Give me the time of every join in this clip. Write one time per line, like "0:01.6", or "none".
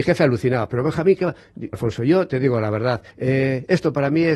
0:01.7
0:03.1